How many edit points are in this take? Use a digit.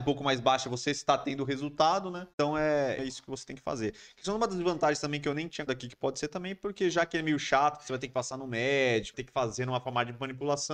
4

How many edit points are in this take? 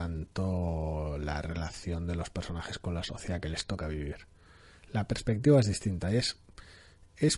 0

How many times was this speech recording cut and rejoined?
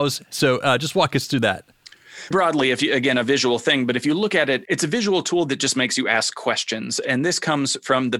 2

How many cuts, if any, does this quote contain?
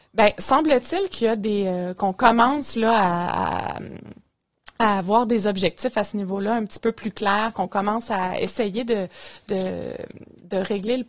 0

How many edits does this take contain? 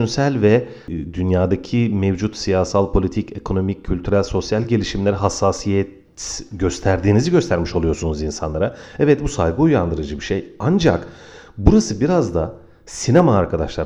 0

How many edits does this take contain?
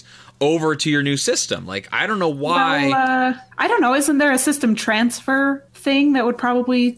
2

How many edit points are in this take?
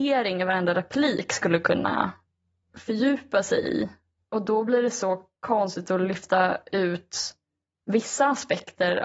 0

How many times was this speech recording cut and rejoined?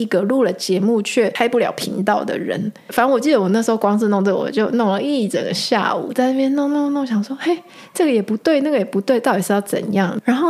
0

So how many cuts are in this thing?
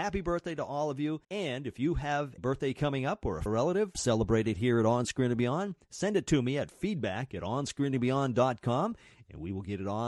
4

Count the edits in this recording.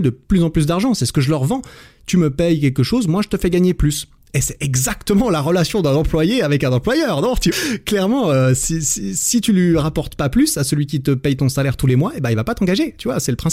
1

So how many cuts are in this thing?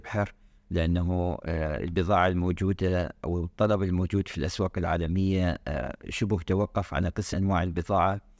1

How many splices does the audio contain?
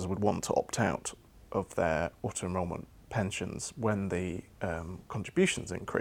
0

